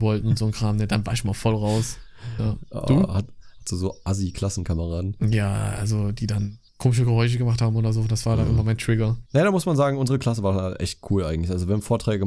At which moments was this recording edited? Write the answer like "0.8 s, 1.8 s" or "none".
6.7 s, 9.3 s